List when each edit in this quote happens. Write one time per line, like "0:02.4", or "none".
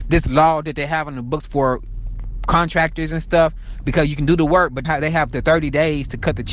0:04.8